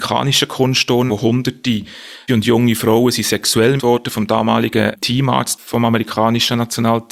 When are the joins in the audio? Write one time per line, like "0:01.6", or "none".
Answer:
0:01.1
0:02.3
0:03.8

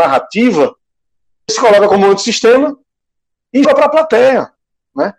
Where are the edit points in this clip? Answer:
0:01.5
0:03.6

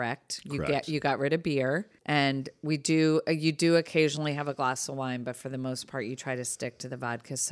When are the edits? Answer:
0:02.0

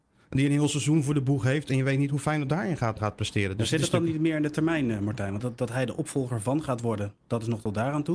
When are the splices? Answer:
0:03.0
0:05.4

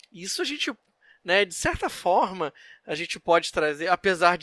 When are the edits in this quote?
none

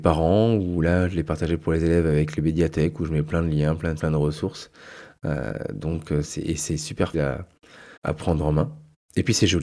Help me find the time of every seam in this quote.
0:04.0
0:06.2
0:07.1
0:08.0

